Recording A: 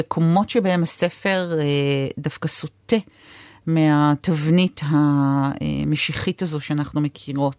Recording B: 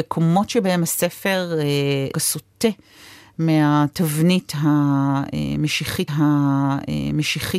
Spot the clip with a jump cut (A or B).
B